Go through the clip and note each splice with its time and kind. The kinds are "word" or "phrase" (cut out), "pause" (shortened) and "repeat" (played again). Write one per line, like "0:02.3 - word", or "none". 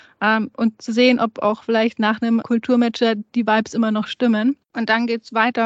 0:02.4 - word
0:04.6 - pause